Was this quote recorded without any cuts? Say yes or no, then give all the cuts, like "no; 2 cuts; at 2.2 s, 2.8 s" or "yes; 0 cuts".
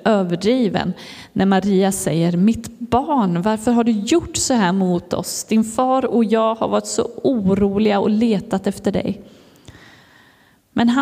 yes; 0 cuts